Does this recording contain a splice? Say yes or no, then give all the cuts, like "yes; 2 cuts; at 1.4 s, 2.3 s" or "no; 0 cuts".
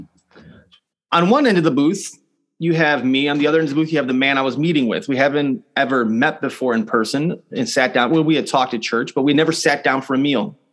no; 0 cuts